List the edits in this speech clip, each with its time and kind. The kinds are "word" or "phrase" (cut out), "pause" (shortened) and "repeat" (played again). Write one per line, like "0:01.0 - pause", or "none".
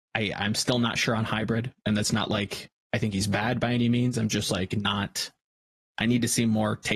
none